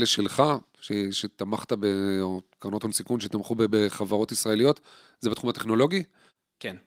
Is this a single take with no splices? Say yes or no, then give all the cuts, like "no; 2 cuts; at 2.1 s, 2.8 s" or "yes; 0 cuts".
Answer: yes; 0 cuts